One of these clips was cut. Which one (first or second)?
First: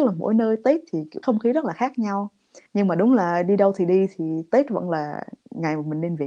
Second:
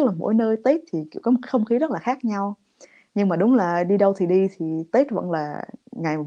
first